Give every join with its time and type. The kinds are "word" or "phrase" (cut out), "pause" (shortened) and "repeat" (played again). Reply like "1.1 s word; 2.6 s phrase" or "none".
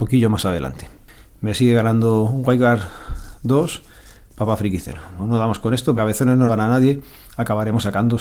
5.2 s word; 6.0 s phrase; 6.5 s word